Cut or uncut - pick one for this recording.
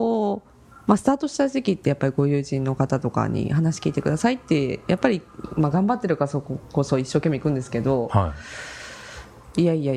uncut